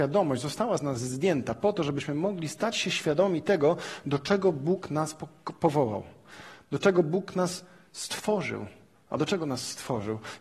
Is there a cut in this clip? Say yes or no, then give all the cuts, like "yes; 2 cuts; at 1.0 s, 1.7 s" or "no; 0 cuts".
no; 0 cuts